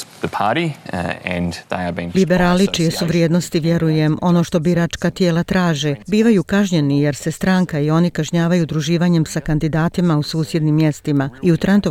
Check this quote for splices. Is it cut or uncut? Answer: cut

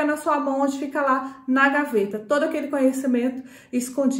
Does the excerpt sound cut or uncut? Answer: uncut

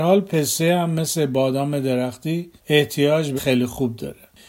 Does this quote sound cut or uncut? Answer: cut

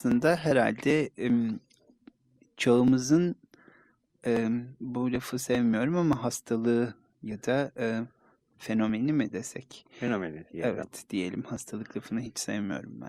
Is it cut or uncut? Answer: uncut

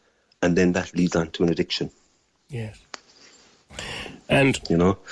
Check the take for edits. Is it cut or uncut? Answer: uncut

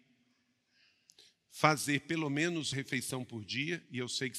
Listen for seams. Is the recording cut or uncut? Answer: cut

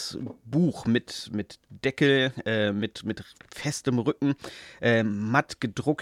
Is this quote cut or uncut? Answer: uncut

